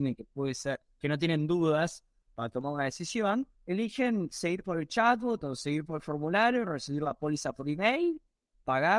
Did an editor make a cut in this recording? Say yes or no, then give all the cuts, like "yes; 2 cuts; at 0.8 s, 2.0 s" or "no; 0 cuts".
yes; 1 cut; at 3.5 s